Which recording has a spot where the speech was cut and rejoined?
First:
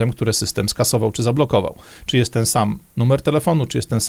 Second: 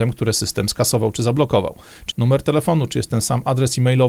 second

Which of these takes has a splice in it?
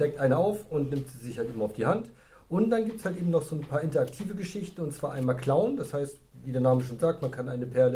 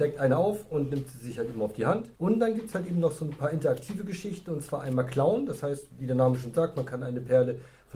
second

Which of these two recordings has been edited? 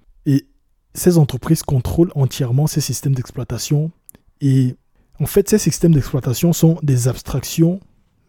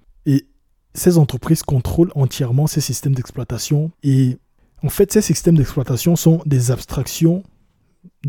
second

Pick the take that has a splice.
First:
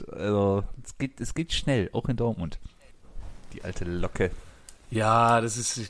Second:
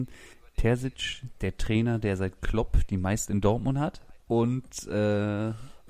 second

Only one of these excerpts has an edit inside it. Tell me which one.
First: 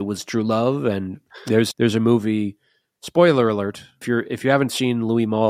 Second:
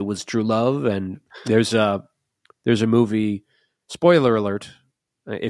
first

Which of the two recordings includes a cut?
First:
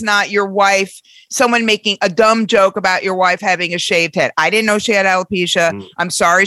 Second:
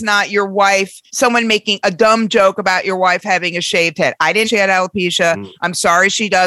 second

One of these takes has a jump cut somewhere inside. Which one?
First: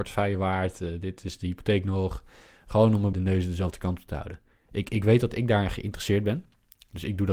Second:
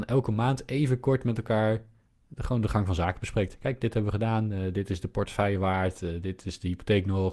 first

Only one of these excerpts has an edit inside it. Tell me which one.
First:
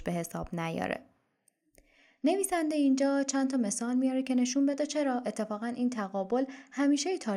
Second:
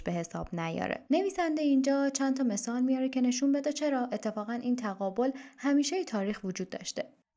second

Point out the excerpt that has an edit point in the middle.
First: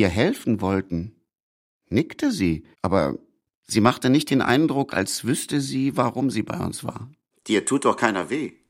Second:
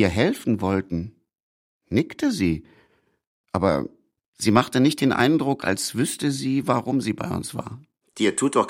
first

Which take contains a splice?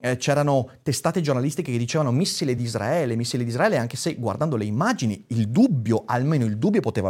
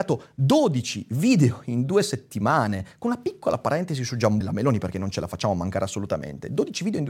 second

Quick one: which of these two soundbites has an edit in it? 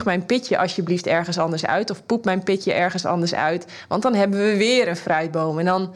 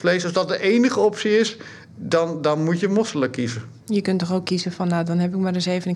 second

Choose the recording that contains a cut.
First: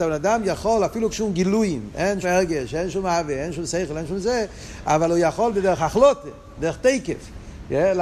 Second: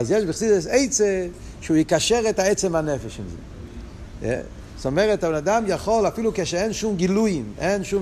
first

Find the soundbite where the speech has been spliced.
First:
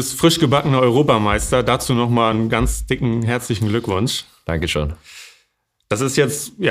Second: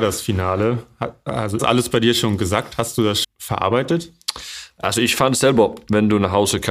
second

